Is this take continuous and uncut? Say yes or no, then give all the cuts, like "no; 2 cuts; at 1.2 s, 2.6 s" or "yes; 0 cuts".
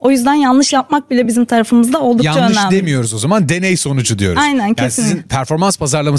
yes; 0 cuts